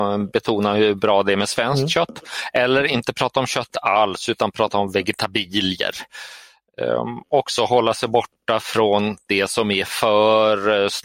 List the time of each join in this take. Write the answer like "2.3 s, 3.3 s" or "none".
none